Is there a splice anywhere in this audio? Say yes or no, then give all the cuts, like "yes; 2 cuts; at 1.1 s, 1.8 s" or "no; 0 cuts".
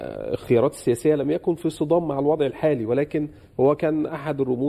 no; 0 cuts